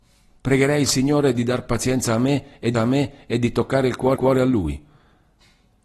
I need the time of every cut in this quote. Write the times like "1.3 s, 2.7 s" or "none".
2.7 s, 4.2 s